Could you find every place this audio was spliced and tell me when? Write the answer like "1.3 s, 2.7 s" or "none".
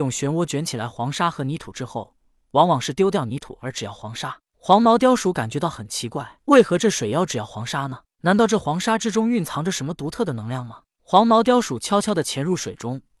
6.4 s